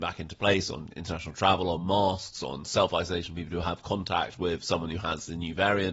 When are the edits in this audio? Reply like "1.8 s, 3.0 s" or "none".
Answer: none